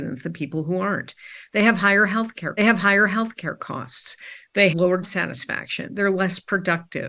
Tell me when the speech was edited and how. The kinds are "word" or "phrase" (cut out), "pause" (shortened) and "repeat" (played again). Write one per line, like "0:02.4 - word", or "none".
0:02.6 - repeat
0:04.7 - word
0:05.0 - word